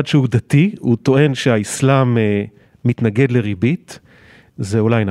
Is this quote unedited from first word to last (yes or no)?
yes